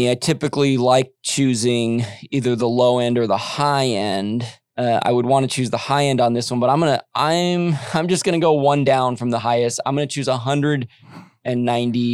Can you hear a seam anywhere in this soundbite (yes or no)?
no